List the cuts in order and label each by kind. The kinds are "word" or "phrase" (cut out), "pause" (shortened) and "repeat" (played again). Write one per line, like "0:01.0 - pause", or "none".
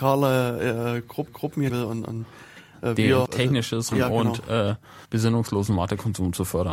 0:01.3 - repeat
0:01.7 - phrase
0:03.3 - word
0:03.9 - word
0:05.0 - pause